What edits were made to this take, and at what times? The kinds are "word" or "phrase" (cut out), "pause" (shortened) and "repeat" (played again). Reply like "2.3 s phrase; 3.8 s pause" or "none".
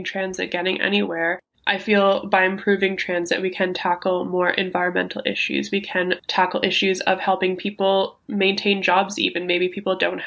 none